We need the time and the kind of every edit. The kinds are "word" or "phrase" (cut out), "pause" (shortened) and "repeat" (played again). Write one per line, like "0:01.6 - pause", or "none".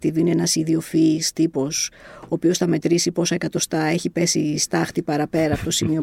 none